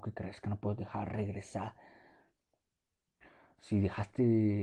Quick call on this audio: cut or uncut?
uncut